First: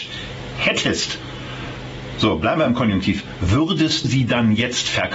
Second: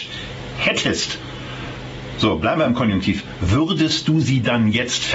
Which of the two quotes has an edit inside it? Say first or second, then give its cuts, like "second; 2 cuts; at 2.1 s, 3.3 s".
first; 1 cut; at 4.0 s